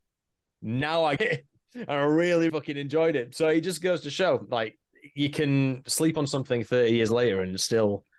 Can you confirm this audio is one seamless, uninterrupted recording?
no; 2 cuts; at 1.2 s, 2.5 s

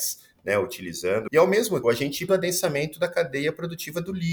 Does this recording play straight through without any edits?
no; 3 cuts; at 1.3 s, 1.8 s, 2.3 s

